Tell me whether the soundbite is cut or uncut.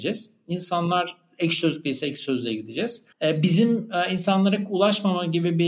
cut